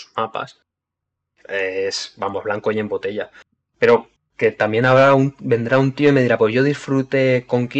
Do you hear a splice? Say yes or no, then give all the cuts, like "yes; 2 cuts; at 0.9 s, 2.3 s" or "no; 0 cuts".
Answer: no; 0 cuts